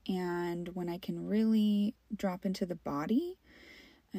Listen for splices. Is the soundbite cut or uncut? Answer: cut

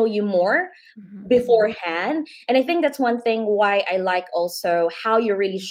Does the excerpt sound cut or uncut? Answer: uncut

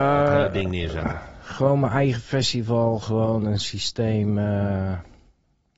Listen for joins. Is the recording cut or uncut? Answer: uncut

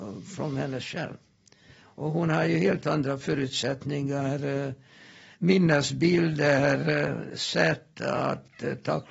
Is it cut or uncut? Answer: uncut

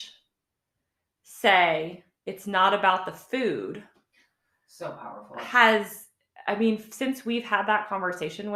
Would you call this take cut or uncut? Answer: uncut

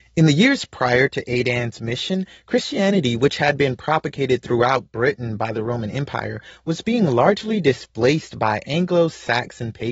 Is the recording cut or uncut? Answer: uncut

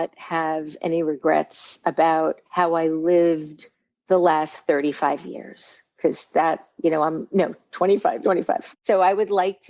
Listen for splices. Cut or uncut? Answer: cut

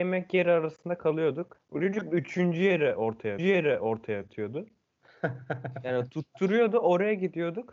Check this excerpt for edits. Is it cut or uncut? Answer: cut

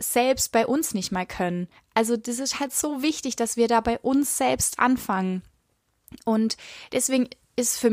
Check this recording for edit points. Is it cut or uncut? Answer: cut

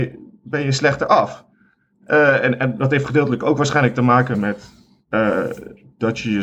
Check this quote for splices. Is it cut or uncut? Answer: uncut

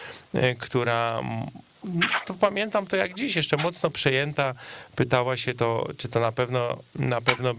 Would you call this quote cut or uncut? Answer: cut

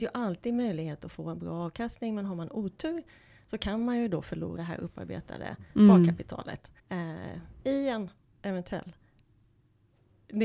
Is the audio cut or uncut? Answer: cut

